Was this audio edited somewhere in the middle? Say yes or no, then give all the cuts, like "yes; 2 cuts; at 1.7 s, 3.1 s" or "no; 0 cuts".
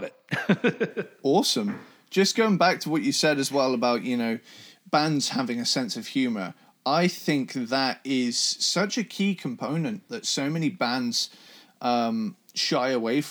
no; 0 cuts